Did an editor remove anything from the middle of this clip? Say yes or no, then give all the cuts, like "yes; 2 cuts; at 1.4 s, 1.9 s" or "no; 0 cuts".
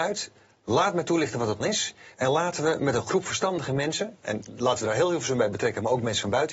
yes; 1 cut; at 1.6 s